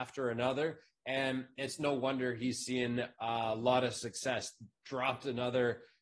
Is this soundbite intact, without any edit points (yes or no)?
yes